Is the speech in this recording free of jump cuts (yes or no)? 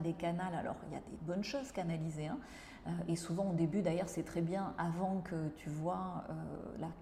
yes